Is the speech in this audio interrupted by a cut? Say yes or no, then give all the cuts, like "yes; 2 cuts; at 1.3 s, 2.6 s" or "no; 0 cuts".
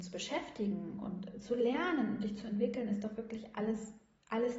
no; 0 cuts